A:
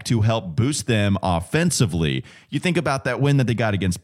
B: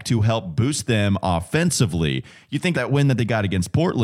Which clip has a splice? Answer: B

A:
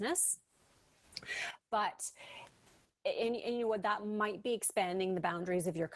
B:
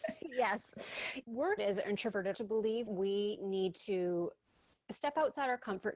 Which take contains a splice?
B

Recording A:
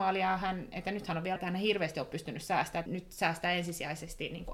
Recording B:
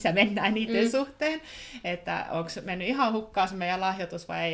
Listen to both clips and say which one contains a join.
A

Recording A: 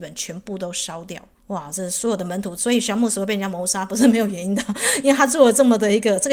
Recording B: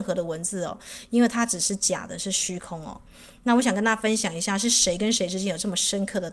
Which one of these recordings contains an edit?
A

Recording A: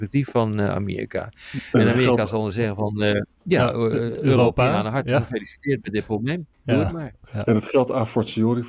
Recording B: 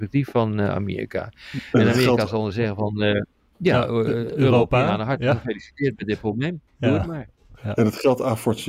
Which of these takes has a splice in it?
A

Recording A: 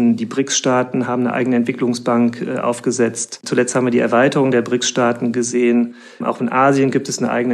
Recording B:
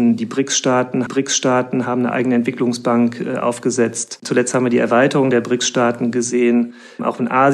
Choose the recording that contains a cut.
B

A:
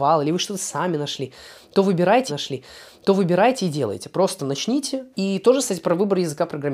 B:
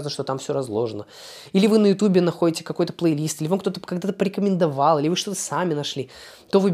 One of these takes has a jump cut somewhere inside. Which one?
A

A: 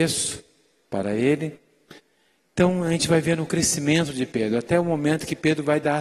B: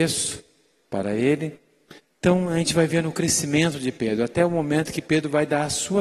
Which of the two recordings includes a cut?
B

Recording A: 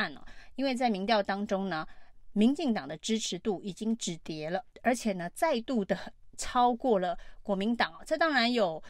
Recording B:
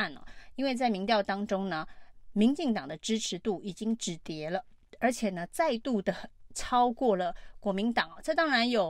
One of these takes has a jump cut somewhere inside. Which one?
A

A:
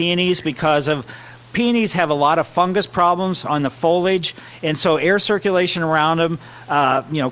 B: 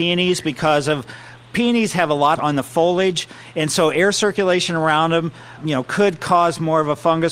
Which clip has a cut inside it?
B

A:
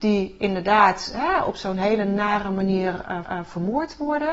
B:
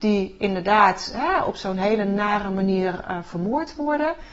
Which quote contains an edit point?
A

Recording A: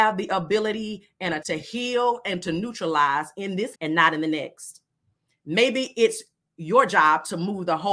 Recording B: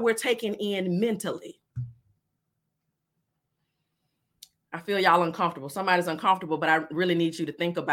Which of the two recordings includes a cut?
A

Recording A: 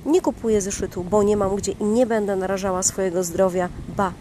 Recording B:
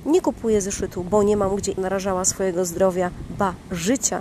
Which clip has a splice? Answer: B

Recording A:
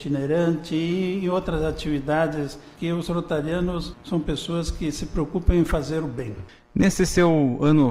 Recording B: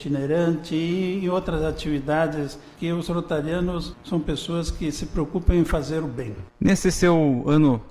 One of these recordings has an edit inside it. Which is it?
B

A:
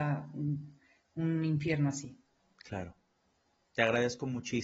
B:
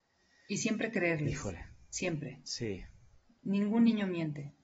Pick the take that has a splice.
A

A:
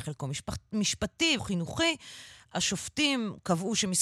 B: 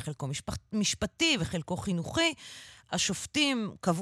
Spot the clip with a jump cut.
A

